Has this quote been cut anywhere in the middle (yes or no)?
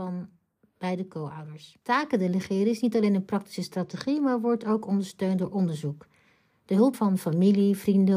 yes